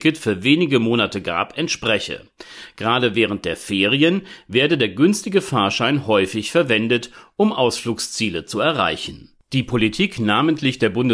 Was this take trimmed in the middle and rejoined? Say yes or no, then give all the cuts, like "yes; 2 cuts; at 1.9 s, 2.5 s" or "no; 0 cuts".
no; 0 cuts